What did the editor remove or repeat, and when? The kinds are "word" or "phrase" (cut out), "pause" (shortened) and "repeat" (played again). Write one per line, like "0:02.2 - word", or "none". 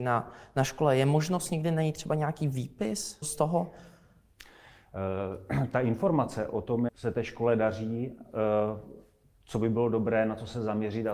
0:03.2 - word
0:06.9 - word